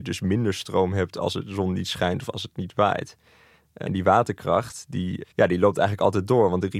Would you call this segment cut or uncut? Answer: cut